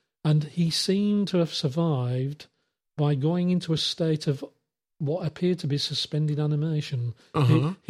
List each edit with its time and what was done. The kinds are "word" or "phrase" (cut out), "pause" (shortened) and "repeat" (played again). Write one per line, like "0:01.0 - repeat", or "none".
none